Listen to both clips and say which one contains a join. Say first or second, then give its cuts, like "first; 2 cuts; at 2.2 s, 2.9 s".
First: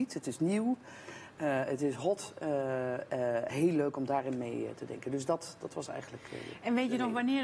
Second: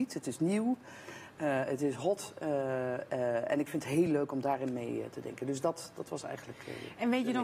first; 1 cut; at 3.5 s